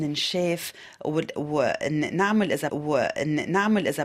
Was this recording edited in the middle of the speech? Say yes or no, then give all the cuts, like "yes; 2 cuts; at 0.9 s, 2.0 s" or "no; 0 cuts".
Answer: yes; 1 cut; at 2.7 s